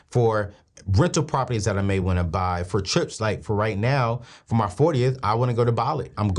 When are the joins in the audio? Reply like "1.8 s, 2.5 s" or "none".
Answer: none